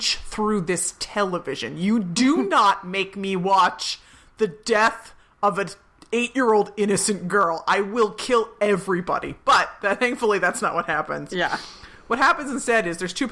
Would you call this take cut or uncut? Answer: uncut